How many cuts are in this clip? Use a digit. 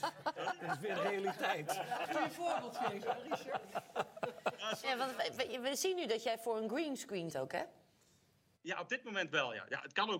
4